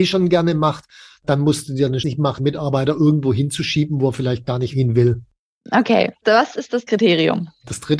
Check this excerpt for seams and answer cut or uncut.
cut